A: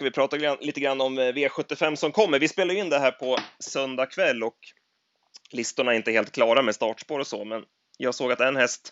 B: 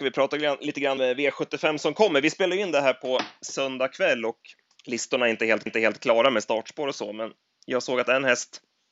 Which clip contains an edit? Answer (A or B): B